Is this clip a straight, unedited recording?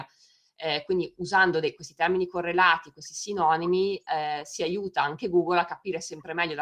yes; 0 cuts

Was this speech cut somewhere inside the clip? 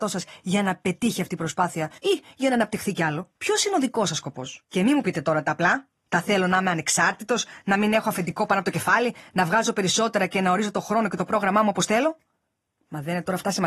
yes; 3 cuts; at 2.0 s, 3.3 s, 4.6 s

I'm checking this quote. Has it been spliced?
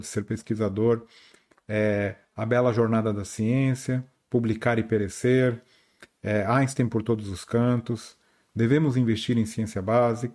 no; 0 cuts

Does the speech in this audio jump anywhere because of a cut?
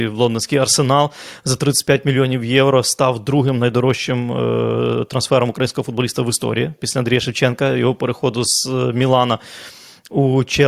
no; 0 cuts

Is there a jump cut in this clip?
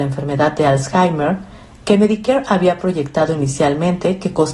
no; 0 cuts

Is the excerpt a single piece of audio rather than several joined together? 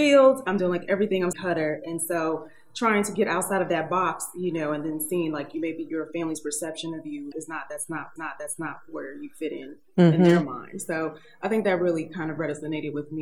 no; 3 cuts; at 1.3 s, 7.3 s, 8.2 s

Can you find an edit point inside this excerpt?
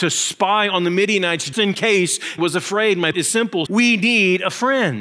yes; 4 cuts; at 1.5 s, 2.4 s, 3.1 s, 3.7 s

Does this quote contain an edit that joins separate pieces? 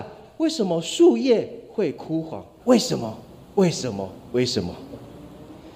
yes; 1 cut; at 2.6 s

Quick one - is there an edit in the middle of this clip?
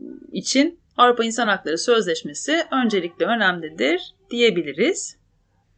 no; 0 cuts

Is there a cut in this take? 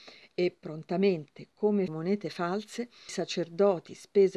yes; 2 cuts; at 1.9 s, 3.1 s

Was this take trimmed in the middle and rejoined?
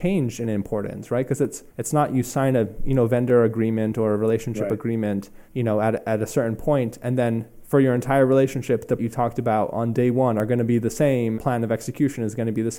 yes; 4 cuts; at 1.7 s, 5.4 s, 9.0 s, 11.3 s

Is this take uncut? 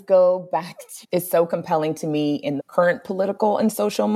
no; 2 cuts; at 1.0 s, 2.6 s

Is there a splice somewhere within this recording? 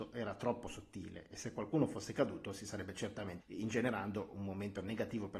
yes; 1 cut; at 3.4 s

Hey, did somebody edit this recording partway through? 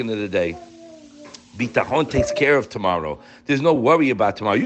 no; 0 cuts

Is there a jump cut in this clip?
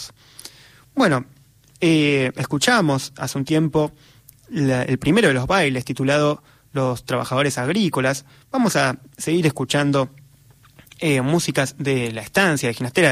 no; 0 cuts

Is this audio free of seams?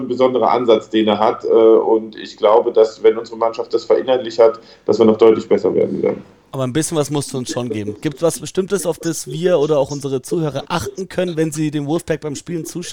yes; 0 cuts

